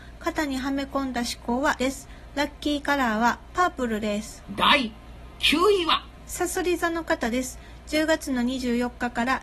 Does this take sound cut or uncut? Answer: cut